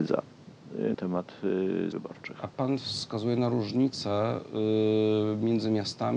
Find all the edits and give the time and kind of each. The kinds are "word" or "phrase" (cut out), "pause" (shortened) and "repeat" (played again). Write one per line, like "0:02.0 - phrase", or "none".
0:00.9 - word
0:01.9 - word
0:02.5 - pause